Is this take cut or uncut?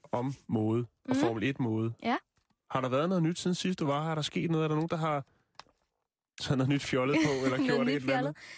uncut